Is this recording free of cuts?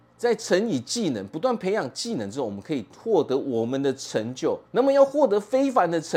no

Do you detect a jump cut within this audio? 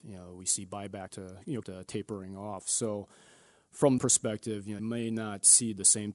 yes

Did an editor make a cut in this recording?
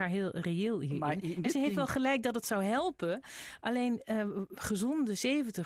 no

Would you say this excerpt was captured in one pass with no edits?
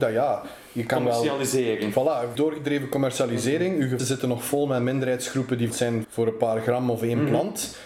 no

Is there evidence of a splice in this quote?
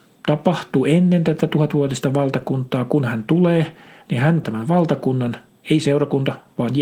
yes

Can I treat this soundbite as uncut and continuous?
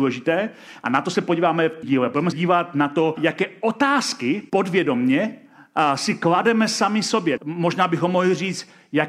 no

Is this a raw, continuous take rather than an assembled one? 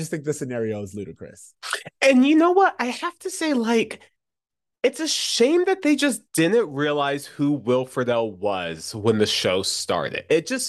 yes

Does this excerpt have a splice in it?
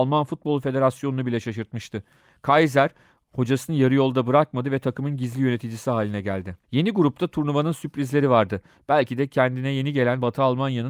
yes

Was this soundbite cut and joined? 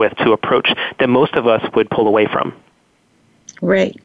no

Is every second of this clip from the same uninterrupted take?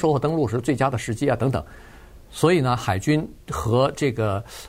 no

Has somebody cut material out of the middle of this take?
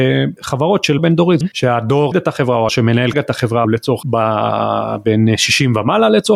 yes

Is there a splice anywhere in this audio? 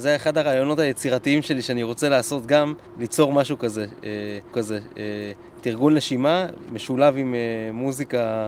yes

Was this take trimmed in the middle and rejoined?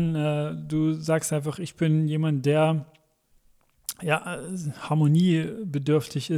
no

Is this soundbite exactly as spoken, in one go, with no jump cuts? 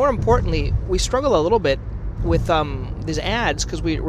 yes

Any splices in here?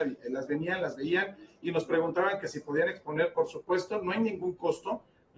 no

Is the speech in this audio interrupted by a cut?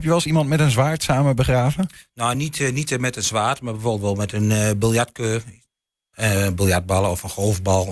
no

